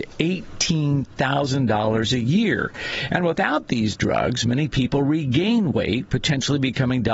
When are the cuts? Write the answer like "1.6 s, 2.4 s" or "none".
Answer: none